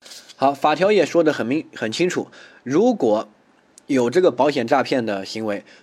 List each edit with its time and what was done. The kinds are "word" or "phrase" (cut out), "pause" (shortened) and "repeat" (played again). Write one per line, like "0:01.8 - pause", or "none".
none